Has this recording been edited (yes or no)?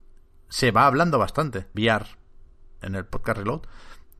yes